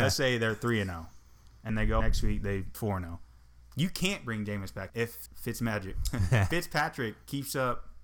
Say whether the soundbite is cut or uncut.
cut